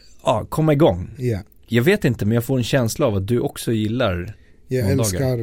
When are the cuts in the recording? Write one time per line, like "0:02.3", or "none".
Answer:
none